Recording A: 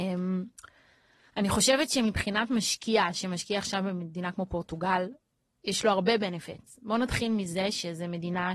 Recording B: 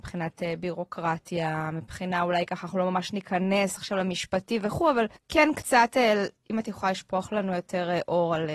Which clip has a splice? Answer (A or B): B